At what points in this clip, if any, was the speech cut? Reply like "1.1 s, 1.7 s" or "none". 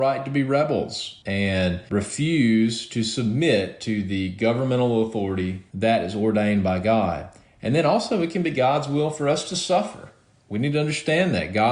none